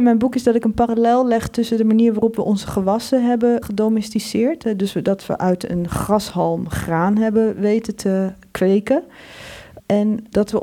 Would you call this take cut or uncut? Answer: uncut